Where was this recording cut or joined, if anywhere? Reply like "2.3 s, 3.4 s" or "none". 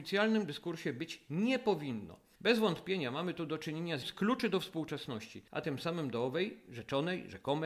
4.0 s